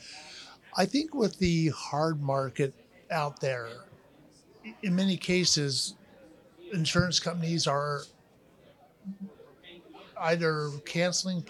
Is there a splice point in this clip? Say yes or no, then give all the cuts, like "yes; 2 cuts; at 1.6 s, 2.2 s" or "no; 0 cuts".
no; 0 cuts